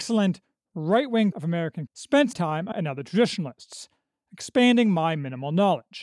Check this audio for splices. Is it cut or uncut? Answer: cut